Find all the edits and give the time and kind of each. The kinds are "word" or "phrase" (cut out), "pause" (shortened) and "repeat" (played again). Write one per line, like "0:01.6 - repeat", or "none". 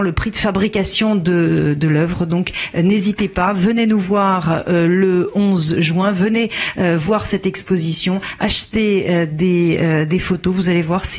none